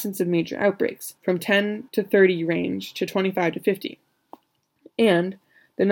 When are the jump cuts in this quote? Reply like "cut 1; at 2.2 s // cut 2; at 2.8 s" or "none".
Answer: cut 1; at 1.2 s // cut 2; at 1.9 s

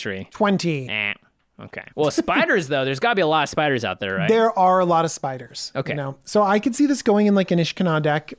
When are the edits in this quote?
cut 1; at 1.9 s

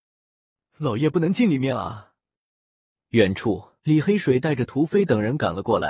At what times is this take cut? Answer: cut 1; at 3.8 s

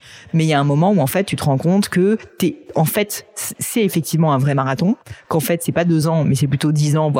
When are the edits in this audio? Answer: none

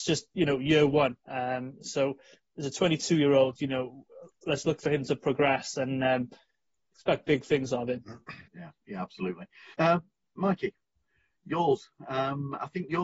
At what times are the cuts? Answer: cut 1; at 1.2 s // cut 2; at 8.5 s // cut 3; at 9.7 s

